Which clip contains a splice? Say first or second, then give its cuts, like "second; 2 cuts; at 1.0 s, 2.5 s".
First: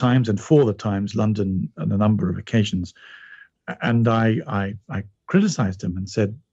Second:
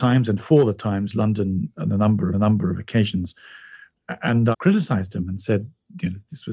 second; 2 cuts; at 2.3 s, 4.5 s